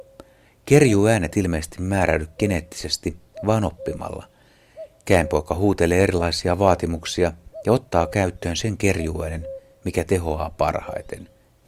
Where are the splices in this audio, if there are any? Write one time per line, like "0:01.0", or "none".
0:01.3